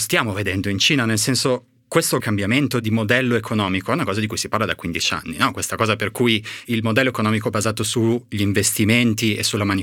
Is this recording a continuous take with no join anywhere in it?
no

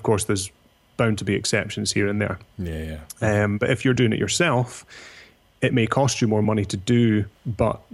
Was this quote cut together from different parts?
no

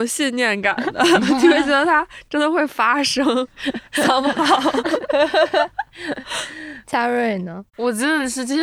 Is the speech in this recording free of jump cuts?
no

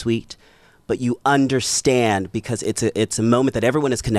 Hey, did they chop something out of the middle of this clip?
no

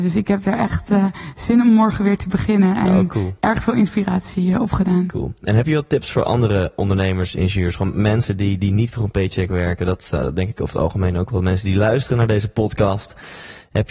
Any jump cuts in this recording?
no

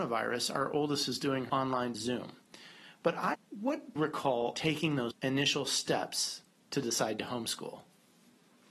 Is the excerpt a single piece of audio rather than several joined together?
no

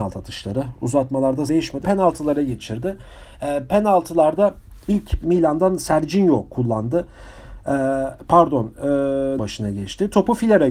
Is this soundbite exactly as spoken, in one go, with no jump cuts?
no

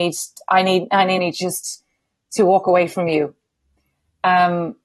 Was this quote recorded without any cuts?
no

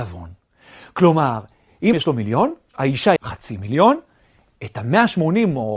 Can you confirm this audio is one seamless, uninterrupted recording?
no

